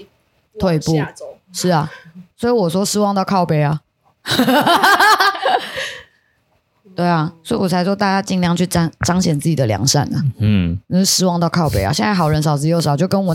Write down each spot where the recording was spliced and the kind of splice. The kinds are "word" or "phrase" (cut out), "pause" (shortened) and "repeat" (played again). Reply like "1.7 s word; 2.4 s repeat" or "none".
2.3 s pause